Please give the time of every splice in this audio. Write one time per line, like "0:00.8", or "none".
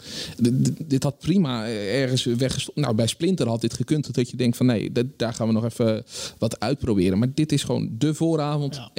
none